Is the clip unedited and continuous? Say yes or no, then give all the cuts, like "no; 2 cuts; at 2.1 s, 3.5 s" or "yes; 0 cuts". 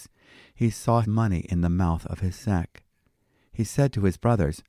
no; 1 cut; at 1.0 s